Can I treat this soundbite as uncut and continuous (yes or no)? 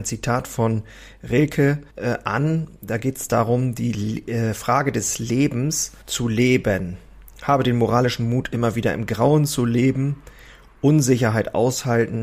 no